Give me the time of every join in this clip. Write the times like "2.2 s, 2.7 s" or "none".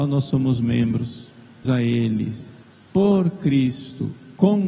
1.6 s, 2.6 s

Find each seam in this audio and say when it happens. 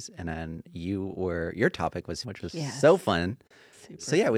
2.2 s

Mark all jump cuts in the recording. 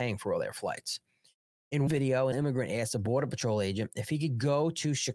1.9 s, 2.3 s

